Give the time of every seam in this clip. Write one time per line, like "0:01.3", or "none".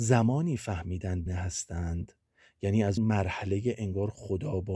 0:01.3
0:03.0